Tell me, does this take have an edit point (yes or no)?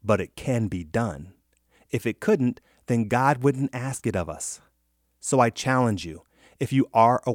no